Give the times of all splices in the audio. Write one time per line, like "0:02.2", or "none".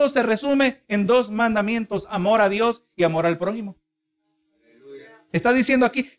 none